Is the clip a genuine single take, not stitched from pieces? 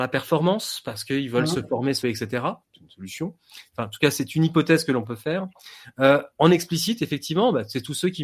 no; 2 cuts; at 2.0 s, 2.6 s

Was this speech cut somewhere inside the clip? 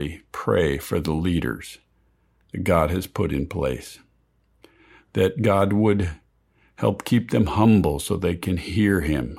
no; 0 cuts

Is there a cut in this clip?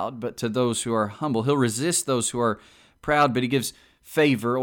no; 0 cuts

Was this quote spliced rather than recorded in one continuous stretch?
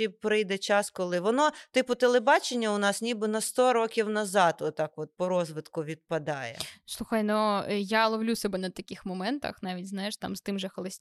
no; 0 cuts

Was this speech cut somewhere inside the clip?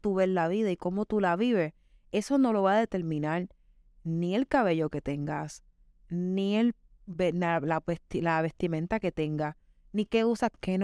no; 0 cuts

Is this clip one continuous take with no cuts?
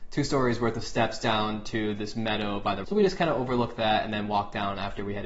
no; 1 cut; at 2.8 s

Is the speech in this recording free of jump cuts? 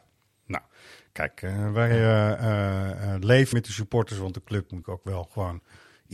no; 2 cuts; at 3.5 s, 4.8 s

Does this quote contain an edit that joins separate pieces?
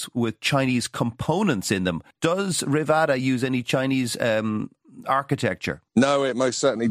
yes; 2 cuts; at 2.1 s, 5.9 s

